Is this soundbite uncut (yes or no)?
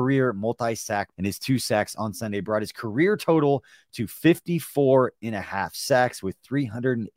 no